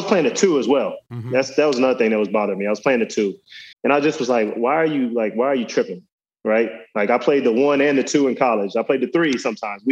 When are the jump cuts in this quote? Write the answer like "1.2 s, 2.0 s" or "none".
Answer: 3.7 s